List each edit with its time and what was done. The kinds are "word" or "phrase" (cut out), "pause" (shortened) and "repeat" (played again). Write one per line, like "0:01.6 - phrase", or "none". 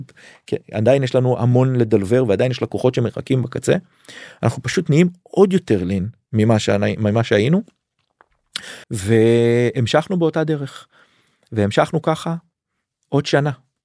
0:08.8 - pause